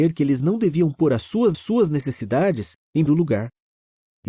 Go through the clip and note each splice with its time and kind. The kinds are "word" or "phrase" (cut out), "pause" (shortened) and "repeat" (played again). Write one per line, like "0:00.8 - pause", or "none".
0:01.5 - repeat
0:03.1 - word